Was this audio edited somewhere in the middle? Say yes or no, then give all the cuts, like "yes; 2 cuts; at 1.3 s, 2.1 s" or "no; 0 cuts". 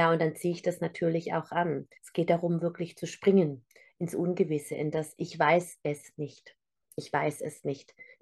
yes; 1 cut; at 2.0 s